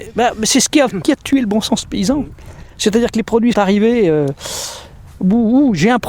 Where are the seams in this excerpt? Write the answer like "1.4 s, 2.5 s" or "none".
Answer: 1.0 s, 3.5 s